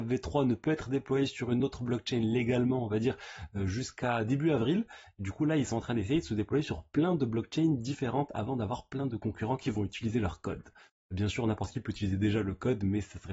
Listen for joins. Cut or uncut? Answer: uncut